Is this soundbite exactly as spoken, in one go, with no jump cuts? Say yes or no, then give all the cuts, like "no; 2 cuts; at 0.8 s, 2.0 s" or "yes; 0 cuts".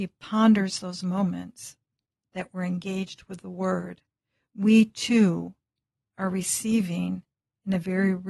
yes; 0 cuts